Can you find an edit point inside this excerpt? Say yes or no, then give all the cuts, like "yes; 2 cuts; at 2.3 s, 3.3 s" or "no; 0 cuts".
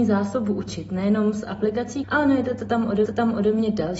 yes; 2 cuts; at 2.0 s, 3.1 s